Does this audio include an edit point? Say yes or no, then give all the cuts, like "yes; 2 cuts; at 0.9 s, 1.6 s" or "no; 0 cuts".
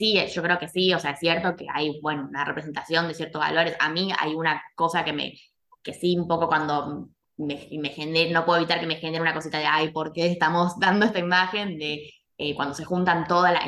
no; 0 cuts